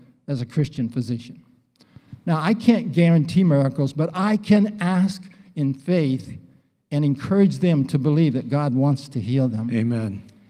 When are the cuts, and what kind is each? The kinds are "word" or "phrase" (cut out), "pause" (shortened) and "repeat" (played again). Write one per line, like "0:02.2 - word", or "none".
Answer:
none